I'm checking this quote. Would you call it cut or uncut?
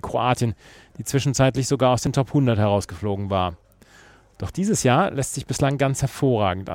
uncut